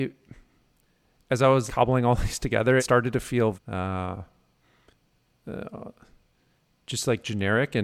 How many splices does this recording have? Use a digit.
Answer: 3